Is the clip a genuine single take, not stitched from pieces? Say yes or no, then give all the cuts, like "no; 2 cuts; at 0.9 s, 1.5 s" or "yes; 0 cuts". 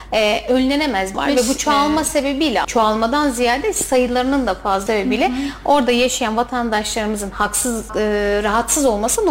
no; 4 cuts; at 1.1 s, 2.6 s, 4.9 s, 7.9 s